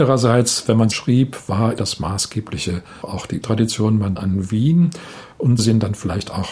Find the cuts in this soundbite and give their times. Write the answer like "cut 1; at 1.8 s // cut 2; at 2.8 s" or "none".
cut 1; at 0.9 s // cut 2; at 1.8 s // cut 3; at 3.0 s // cut 4; at 3.4 s // cut 5; at 4.2 s // cut 6; at 5.6 s